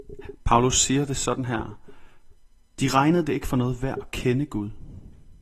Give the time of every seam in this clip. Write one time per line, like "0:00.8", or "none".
none